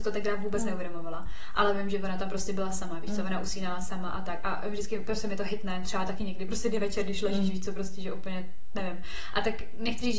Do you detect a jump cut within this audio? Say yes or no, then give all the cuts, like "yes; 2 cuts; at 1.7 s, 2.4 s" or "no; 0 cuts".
no; 0 cuts